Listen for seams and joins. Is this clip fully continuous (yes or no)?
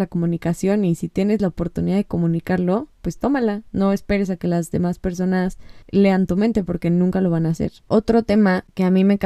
no